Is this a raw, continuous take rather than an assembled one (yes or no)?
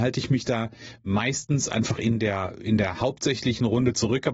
yes